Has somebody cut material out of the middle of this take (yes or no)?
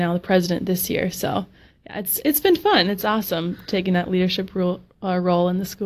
no